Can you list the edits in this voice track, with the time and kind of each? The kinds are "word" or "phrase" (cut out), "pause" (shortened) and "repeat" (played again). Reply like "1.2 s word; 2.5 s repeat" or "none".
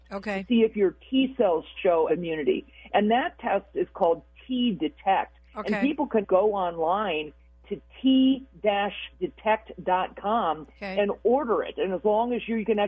1.8 s word; 2.1 s phrase; 6.2 s word; 9.1 s pause